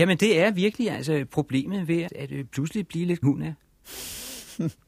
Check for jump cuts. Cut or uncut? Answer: cut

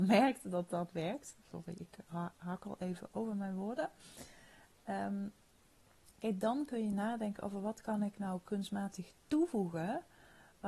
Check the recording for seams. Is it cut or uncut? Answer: uncut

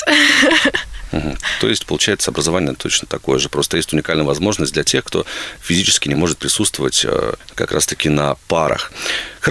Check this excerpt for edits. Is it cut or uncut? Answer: uncut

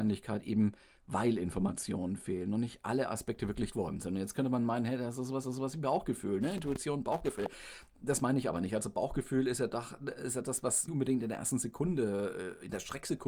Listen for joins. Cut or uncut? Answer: cut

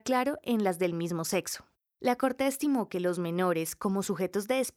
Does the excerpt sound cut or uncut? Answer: uncut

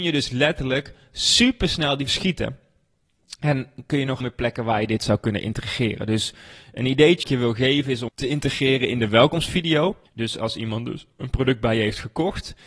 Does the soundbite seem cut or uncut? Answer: cut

